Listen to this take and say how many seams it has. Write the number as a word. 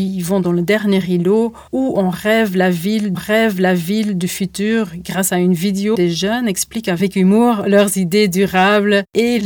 three